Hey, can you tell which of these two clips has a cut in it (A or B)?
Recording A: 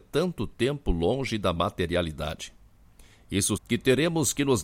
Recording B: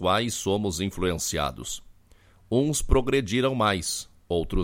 A